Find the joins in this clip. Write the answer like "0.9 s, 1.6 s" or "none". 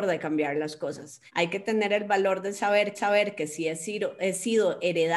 1.3 s, 2.9 s